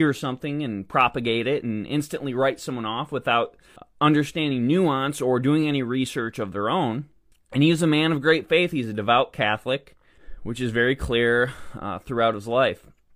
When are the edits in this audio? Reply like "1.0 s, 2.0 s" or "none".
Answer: none

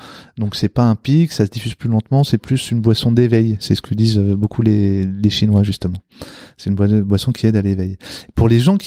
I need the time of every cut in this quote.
none

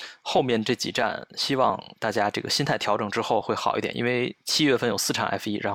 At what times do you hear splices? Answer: none

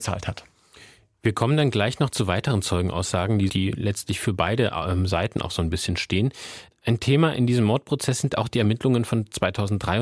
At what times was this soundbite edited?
3.5 s

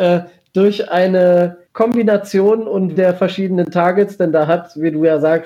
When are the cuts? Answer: 1.7 s, 2.9 s

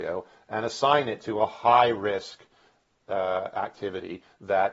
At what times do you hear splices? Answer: none

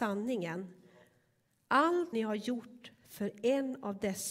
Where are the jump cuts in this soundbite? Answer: 2.1 s

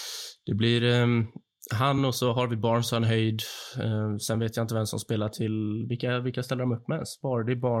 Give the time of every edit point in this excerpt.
none

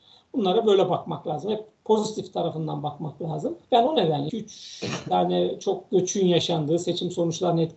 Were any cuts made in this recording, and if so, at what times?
3.6 s, 4.3 s

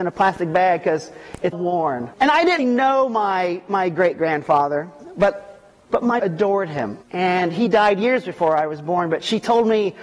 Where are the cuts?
1.5 s, 2.1 s, 2.6 s, 5.8 s, 6.2 s, 7.0 s

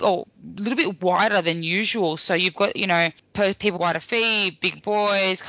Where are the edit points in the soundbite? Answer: 3.8 s

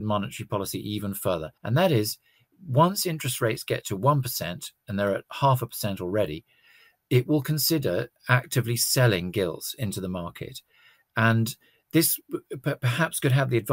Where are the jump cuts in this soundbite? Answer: 1.6 s

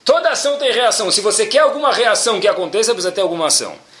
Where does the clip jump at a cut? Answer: none

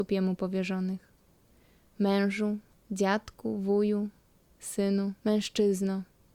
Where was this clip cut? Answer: 2.7 s, 5.2 s

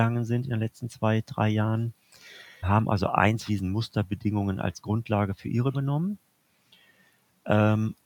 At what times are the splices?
2.6 s, 3.5 s, 5.7 s

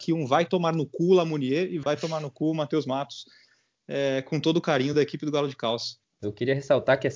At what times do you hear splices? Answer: none

